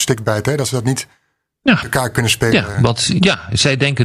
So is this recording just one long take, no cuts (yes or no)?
yes